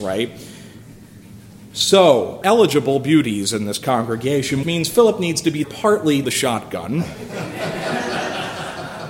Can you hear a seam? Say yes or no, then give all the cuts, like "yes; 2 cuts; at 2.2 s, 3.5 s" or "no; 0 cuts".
yes; 4 cuts; at 2.4 s, 4.6 s, 5.6 s, 6.2 s